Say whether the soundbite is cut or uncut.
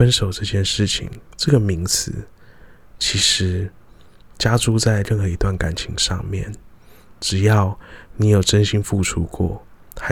uncut